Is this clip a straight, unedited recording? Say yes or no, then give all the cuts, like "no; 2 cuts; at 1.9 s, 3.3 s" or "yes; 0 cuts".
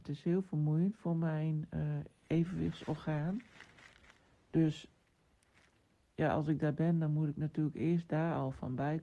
yes; 0 cuts